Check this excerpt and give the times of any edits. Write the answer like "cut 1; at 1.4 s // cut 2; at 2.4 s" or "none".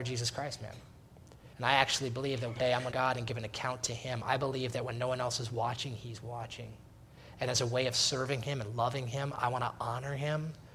cut 1; at 1.5 s // cut 2; at 2.6 s // cut 3; at 2.9 s